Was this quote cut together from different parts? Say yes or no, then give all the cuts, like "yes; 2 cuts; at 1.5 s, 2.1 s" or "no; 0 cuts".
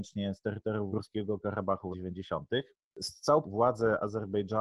yes; 3 cuts; at 0.9 s, 1.9 s, 3.4 s